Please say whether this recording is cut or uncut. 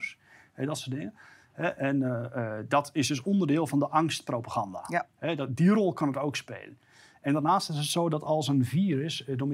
uncut